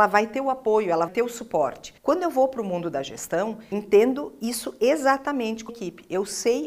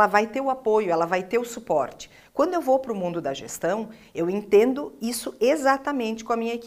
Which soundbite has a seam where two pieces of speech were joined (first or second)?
first